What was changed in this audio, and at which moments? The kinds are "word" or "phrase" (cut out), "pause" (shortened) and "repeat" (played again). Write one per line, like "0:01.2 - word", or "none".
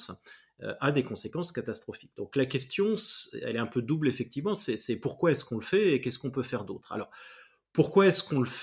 none